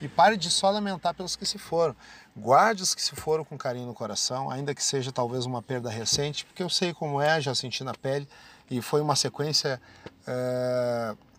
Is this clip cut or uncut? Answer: uncut